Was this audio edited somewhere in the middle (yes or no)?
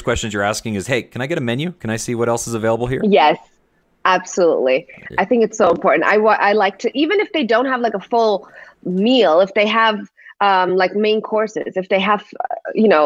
no